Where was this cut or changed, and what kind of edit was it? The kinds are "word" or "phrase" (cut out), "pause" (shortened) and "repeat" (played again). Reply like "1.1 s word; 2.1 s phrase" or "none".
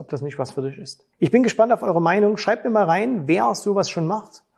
1.1 s pause